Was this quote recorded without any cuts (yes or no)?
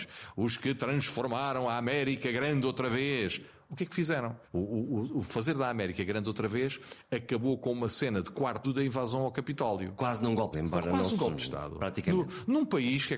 no